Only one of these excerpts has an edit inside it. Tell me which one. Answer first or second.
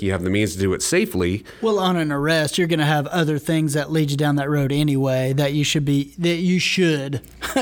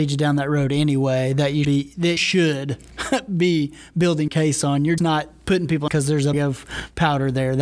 second